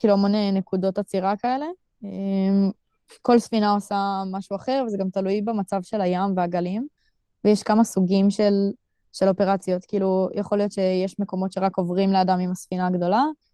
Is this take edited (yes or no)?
no